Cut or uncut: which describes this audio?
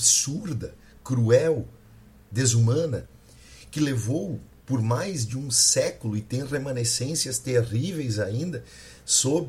uncut